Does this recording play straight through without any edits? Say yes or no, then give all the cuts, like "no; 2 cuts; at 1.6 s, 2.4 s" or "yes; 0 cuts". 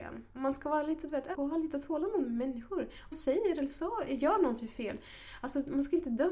no; 2 cuts; at 1.3 s, 3.1 s